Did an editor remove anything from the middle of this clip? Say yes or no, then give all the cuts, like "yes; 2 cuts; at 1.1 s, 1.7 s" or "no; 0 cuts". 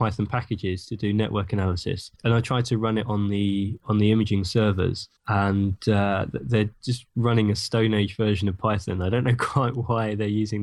yes; 3 cuts; at 2.2 s, 3.8 s, 5.2 s